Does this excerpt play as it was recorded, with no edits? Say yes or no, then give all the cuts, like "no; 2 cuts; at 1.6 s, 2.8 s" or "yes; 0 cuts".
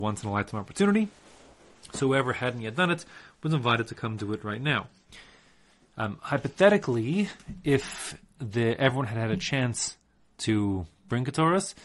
yes; 0 cuts